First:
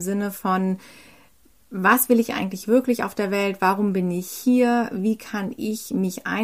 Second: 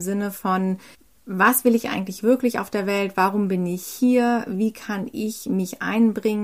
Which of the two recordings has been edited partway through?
second; 1 cut; at 0.9 s

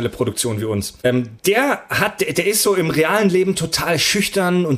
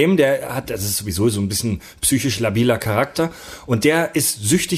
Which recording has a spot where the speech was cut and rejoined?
first; 1 cut; at 1.0 s

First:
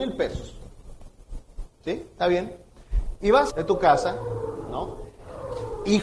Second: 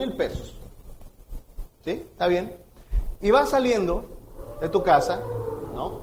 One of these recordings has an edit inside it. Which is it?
first; 1 cut; at 3.5 s

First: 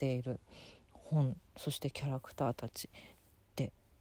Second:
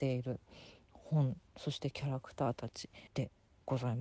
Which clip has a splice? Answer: second; 1 cut; at 3.1 s

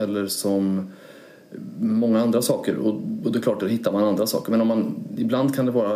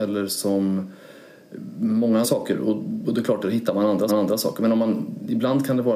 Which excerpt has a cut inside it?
second; 2 cuts; at 2.2 s, 4.1 s

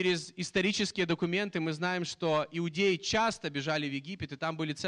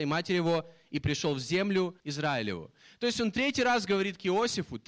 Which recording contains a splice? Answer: second; 1 cut; at 2.0 s

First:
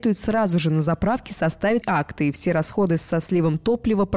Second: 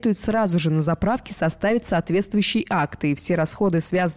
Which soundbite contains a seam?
first; 2 cuts; at 1.8 s, 3.0 s

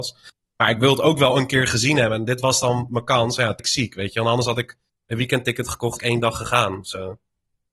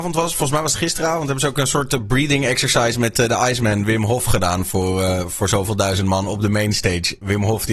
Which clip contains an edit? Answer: first; 2 cuts; at 3.6 s, 6.0 s

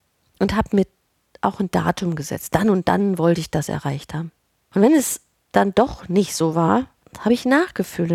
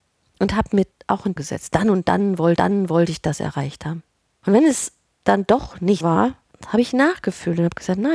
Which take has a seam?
second; 4 cuts; at 0.9 s, 1.4 s, 2.6 s, 6.0 s

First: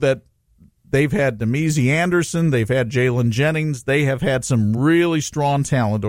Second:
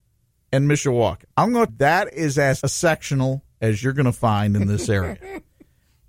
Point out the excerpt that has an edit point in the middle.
second; 3 cuts; at 1.3 s, 1.7 s, 2.6 s

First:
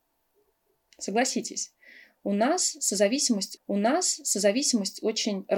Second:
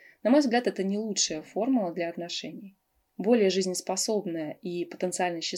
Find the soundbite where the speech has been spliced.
first; 1 cut; at 3.6 s

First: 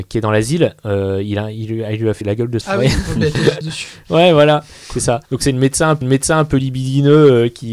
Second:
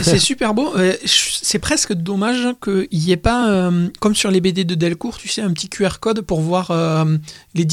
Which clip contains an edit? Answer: first; 5 cuts; at 2.2 s, 2.6 s, 3.6 s, 5.2 s, 6.0 s

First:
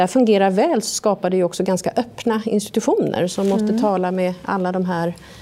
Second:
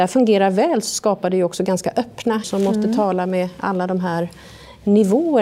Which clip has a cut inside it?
second; 1 cut; at 2.4 s

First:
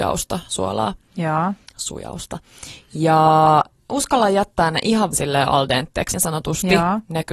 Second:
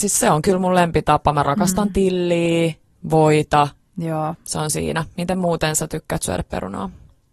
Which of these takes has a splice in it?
first; 4 cuts; at 1.7 s, 3.9 s, 5.1 s, 6.1 s

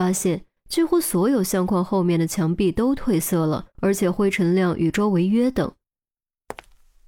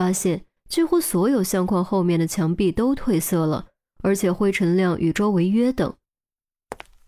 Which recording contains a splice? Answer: first; 1 cut; at 3.7 s

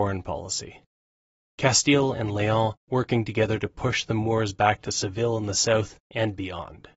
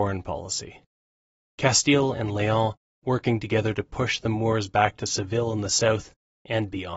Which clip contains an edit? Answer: first; 2 cuts; at 2.8 s, 6.0 s

